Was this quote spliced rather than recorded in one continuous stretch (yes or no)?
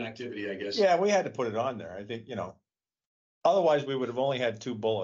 no